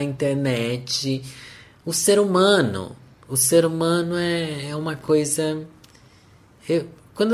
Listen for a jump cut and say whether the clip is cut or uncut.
uncut